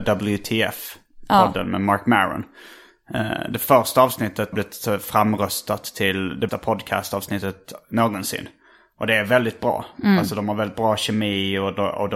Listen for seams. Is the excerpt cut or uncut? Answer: cut